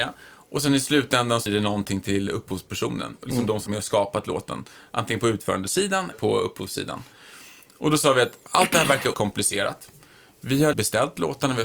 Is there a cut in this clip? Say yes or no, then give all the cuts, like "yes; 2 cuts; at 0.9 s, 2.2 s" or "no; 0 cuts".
yes; 6 cuts; at 1.5 s, 3.7 s, 6.1 s, 8.5 s, 9.1 s, 10.7 s